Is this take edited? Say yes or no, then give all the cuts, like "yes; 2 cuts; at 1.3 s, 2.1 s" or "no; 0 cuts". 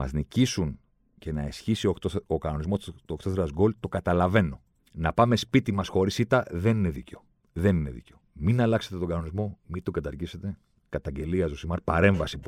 no; 0 cuts